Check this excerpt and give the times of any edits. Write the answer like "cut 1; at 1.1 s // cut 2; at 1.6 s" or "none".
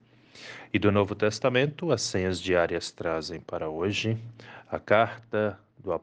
none